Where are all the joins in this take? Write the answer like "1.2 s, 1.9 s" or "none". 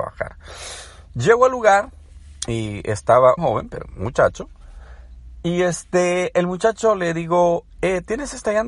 3.4 s